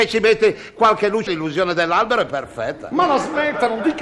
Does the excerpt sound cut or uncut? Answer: cut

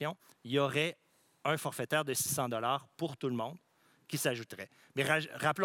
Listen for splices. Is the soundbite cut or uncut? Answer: uncut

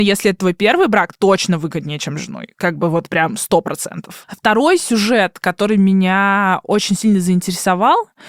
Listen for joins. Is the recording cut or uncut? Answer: cut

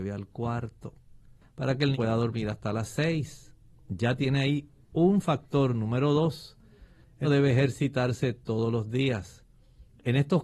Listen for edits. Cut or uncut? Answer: cut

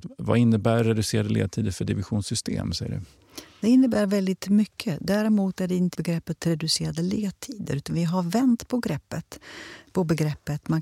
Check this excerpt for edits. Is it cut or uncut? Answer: cut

